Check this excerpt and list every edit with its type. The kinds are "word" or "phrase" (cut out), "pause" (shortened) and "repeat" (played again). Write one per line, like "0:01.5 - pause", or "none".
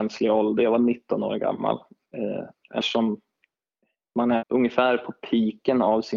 0:02.8 - word
0:04.4 - word